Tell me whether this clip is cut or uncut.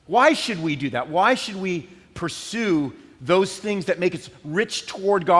uncut